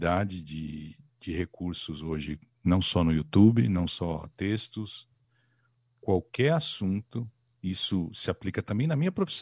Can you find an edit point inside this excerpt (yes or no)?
no